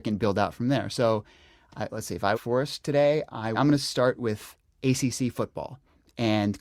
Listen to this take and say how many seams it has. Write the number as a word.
two